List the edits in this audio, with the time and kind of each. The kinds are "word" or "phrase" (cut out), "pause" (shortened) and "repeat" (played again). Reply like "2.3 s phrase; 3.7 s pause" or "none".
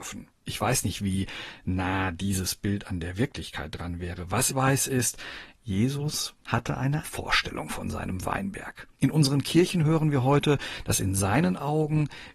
4.5 s word; 7.0 s word; 8.9 s pause